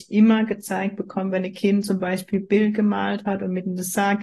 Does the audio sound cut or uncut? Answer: uncut